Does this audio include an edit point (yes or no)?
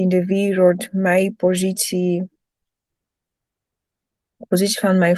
no